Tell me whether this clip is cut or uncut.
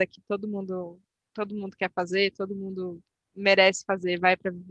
uncut